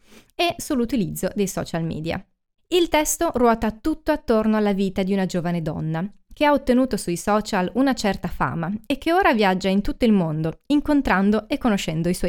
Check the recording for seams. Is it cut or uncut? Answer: cut